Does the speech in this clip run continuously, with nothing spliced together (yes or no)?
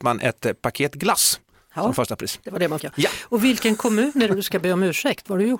no